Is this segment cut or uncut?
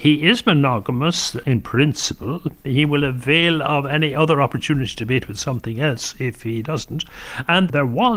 uncut